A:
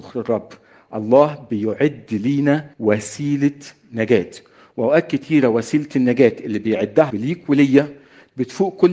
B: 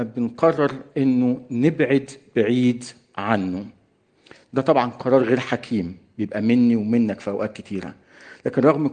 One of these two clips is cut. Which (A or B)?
A